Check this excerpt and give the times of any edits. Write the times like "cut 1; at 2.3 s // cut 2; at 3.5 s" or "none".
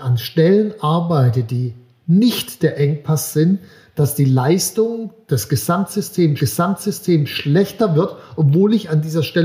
cut 1; at 6.4 s